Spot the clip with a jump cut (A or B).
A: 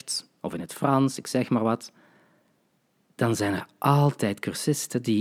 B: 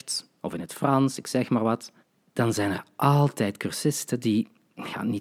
B